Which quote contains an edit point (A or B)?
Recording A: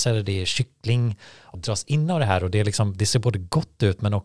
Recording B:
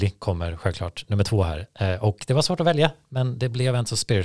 A